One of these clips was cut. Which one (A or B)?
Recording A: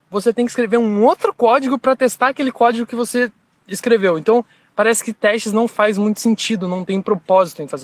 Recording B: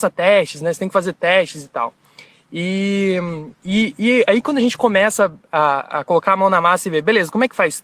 B